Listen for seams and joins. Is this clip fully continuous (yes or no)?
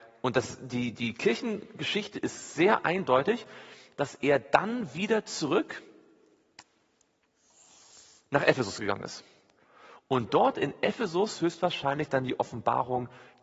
yes